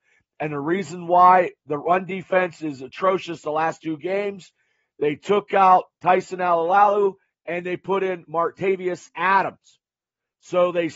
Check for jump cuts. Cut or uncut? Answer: uncut